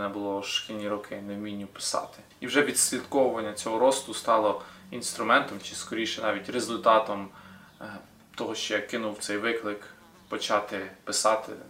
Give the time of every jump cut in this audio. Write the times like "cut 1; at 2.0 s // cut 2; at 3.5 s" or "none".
none